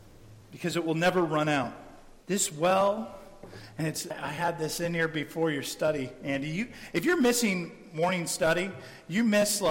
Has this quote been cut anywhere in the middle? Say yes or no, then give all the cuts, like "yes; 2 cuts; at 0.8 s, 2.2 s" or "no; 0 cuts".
yes; 1 cut; at 2.2 s